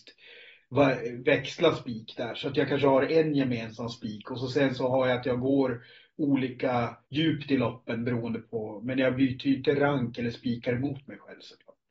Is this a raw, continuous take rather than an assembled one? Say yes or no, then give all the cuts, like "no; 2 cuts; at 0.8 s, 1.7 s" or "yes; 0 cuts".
no; 1 cut; at 7.0 s